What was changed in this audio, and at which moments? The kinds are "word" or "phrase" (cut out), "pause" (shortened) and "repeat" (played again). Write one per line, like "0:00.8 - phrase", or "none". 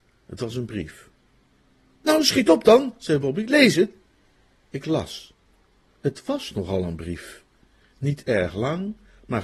none